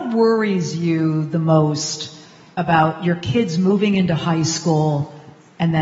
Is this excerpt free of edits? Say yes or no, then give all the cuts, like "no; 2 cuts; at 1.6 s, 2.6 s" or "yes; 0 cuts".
yes; 0 cuts